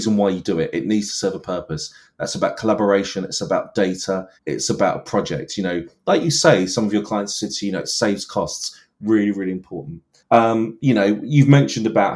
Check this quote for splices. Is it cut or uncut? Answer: cut